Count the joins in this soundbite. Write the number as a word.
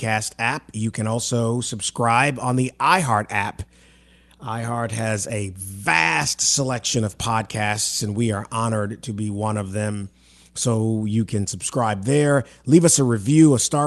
zero